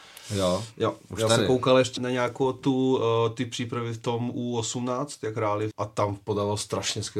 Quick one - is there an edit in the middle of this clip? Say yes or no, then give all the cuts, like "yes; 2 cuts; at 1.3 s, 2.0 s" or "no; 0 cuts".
yes; 2 cuts; at 2.0 s, 5.7 s